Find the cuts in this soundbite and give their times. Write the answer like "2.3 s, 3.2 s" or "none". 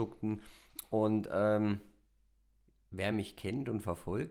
none